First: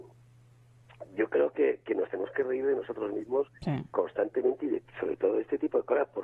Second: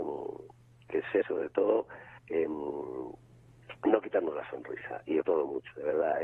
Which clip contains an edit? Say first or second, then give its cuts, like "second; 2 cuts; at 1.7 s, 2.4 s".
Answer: second; 3 cuts; at 1.2 s, 2.2 s, 5.2 s